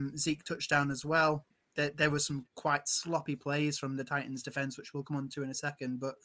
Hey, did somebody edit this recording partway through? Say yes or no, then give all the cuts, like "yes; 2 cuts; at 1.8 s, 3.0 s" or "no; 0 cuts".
no; 0 cuts